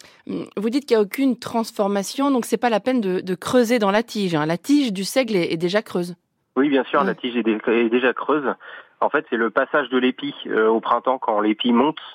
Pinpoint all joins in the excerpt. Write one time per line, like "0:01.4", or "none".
none